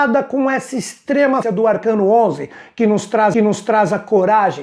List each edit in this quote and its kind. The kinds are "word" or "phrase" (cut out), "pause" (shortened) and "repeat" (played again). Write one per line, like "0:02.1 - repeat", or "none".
0:01.4 - word
0:03.3 - repeat